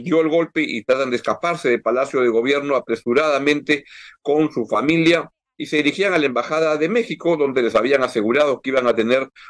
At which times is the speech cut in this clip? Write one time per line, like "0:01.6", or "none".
none